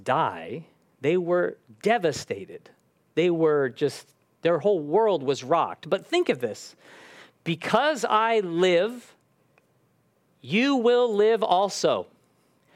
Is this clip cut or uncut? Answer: uncut